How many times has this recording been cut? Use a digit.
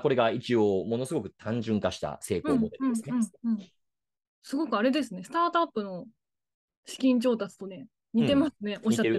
1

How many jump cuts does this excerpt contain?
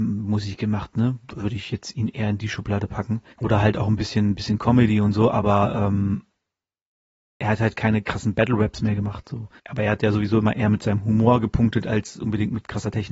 2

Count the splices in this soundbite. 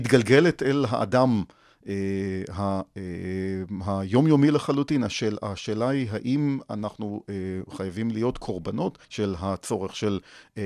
1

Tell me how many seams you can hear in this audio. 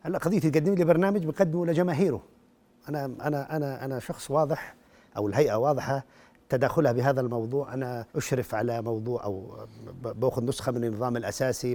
1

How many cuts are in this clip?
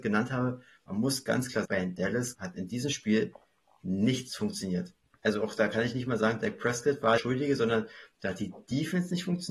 3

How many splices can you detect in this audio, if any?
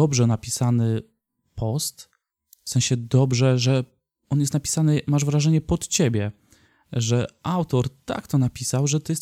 0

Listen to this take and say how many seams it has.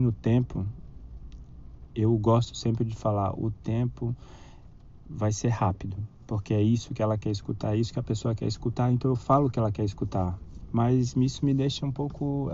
1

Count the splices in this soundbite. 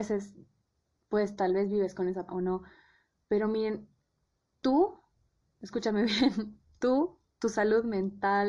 1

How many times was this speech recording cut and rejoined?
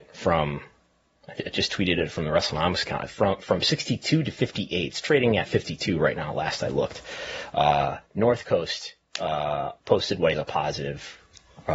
3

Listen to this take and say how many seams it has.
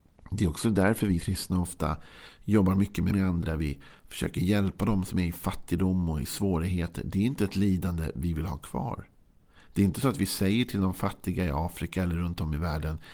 3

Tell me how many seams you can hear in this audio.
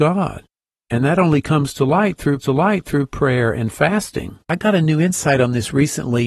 2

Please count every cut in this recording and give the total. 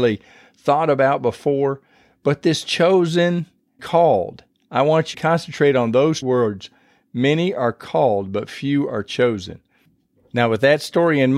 3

